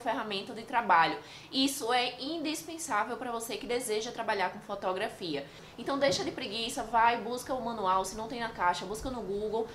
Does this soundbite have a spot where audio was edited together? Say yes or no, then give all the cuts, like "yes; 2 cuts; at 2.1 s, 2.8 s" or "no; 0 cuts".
no; 0 cuts